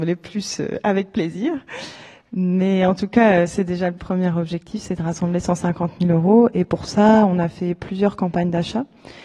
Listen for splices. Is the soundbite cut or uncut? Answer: uncut